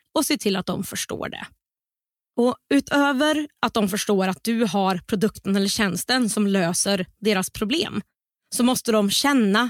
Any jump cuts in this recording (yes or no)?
no